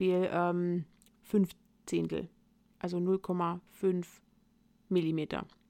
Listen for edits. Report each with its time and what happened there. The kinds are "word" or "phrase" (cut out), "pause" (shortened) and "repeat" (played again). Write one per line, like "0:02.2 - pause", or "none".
none